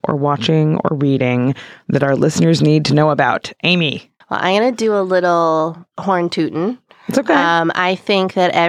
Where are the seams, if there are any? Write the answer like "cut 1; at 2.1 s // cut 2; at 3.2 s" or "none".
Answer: cut 1; at 4.2 s